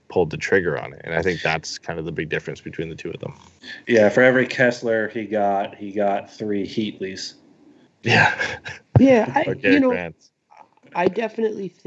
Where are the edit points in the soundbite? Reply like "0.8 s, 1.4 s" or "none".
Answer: none